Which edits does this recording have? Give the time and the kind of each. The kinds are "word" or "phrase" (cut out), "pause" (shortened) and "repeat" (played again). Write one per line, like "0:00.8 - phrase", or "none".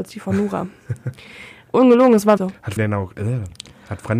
0:01.7 - word
0:02.4 - word
0:02.8 - word